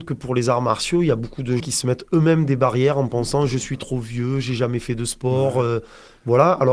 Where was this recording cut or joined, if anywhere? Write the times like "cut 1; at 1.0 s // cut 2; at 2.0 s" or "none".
cut 1; at 1.6 s